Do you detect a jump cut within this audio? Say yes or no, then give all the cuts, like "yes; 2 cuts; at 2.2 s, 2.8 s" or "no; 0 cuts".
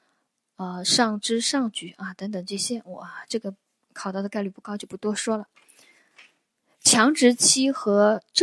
no; 0 cuts